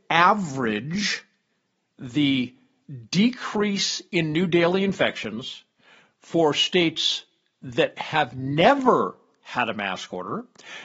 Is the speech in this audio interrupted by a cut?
no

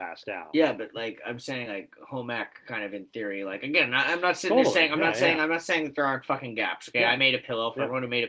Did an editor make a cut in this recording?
no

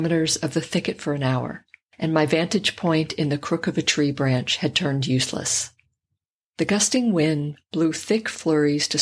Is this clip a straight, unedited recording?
yes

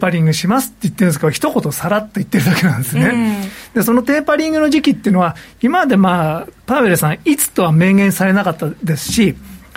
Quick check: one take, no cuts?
no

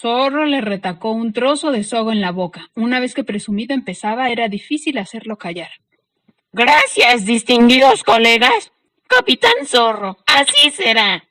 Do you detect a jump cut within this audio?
no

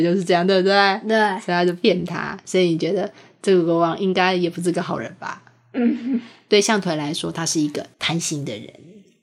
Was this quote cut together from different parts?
yes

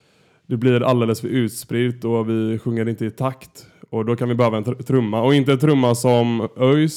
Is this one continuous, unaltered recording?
yes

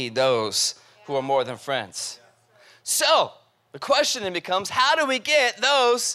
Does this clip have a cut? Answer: no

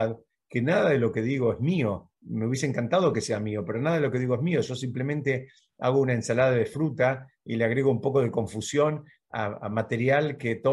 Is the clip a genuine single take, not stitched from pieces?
yes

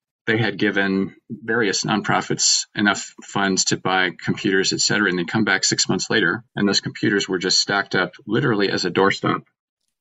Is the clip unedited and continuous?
no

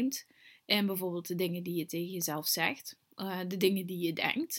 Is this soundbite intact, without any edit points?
yes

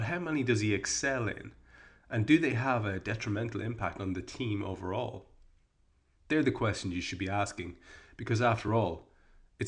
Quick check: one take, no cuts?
yes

